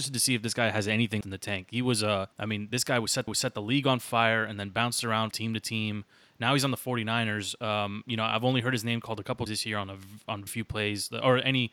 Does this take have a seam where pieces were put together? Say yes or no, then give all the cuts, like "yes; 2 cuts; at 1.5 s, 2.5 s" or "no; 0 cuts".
yes; 6 cuts; at 1.2 s, 2.3 s, 3.3 s, 5.3 s, 9.5 s, 10.5 s